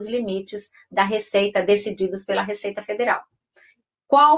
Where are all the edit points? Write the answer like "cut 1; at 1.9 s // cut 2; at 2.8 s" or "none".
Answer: none